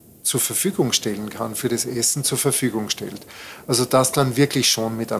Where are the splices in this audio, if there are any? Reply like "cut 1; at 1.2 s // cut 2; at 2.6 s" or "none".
none